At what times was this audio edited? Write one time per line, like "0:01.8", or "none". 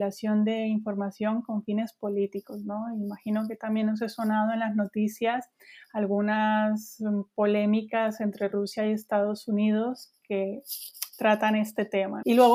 none